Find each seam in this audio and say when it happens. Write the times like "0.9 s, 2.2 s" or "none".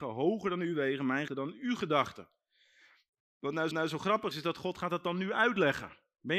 1.3 s, 3.7 s, 4.3 s